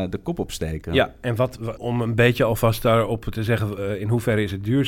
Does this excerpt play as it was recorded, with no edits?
no; 1 cut; at 1.8 s

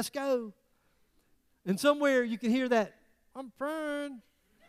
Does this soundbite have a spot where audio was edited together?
no; 0 cuts

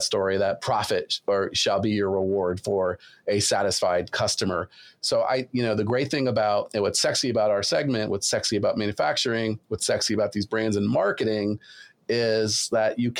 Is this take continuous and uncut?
yes; 0 cuts

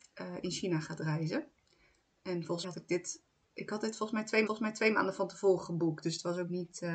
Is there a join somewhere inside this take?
yes; 2 cuts; at 2.6 s, 4.5 s

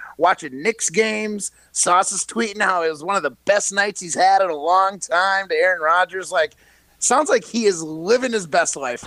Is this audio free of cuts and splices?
yes; 0 cuts

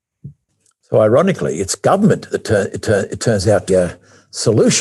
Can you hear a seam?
yes; 2 cuts; at 2.8 s, 3.7 s

